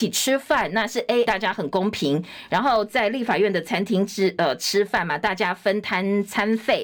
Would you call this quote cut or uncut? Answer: cut